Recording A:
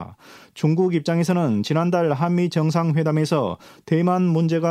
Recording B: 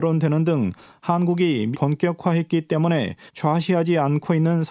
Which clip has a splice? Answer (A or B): B